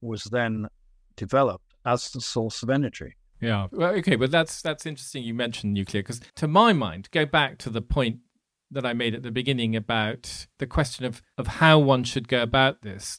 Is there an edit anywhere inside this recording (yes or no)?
yes